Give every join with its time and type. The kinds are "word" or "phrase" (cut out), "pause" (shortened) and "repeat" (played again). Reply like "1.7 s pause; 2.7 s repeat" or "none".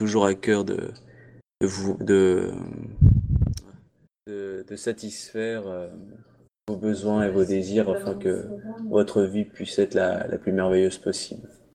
none